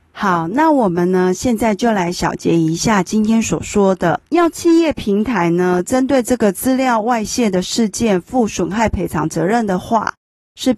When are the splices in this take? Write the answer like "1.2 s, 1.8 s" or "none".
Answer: 4.3 s